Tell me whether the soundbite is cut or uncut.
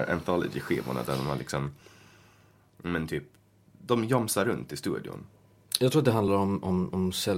uncut